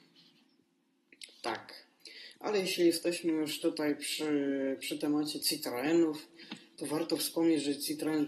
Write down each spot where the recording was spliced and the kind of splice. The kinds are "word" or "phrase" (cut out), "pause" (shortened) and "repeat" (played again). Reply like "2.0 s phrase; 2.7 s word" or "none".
none

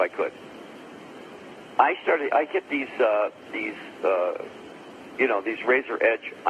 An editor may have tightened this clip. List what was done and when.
none

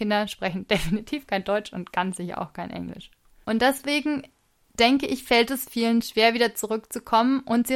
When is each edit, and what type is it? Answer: none

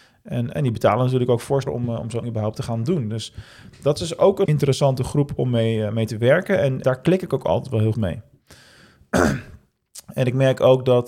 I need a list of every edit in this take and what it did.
1.7 s word; 2.2 s word; 4.5 s word; 6.8 s word; 7.9 s word

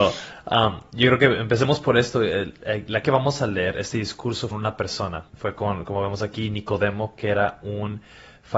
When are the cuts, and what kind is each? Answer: 3.0 s word; 4.5 s phrase; 5.3 s pause

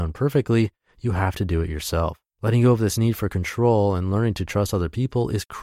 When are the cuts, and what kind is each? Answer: 2.3 s pause

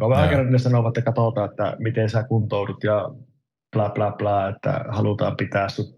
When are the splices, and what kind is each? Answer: none

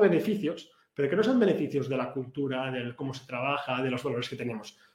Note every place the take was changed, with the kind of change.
none

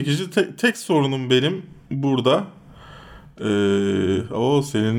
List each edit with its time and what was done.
none

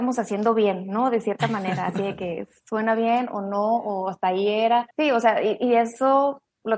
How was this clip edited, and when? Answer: 4.9 s pause

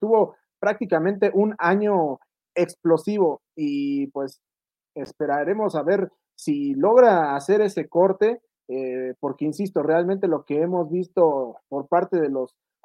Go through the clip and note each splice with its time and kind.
none

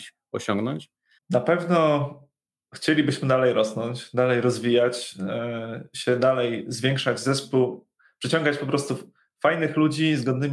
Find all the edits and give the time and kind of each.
1.2 s pause

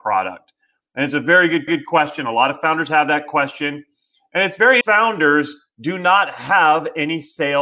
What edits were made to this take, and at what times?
1.7 s repeat; 4.8 s phrase

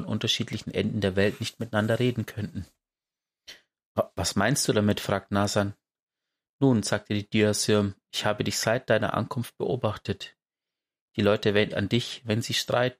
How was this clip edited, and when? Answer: 11.7 s word

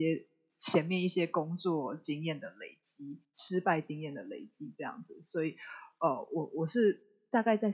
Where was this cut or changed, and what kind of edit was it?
none

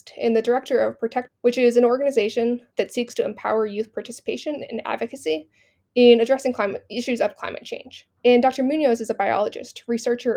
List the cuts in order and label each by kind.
1.3 s phrase; 2.7 s pause; 8.2 s pause

